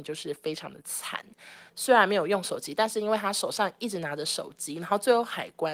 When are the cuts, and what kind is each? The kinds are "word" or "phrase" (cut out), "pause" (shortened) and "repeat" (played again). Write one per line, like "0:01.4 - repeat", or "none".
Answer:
0:01.7 - pause